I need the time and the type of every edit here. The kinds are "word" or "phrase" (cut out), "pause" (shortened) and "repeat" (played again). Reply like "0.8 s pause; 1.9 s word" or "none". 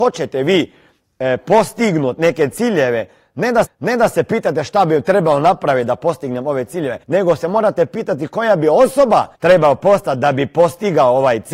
3.6 s repeat; 7.0 s pause; 9.3 s pause